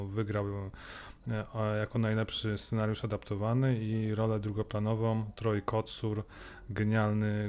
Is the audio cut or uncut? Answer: uncut